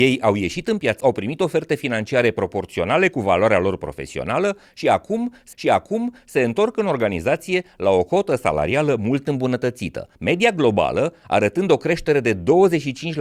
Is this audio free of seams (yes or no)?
no